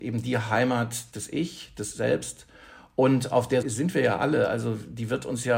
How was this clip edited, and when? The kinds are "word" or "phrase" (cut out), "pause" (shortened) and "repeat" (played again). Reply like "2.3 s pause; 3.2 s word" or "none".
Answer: 1.1 s word; 3.6 s word